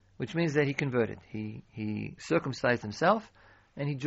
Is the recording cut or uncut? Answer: cut